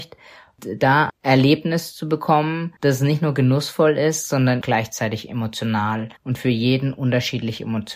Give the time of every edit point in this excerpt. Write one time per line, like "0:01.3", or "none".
0:01.1
0:02.8
0:04.6
0:06.2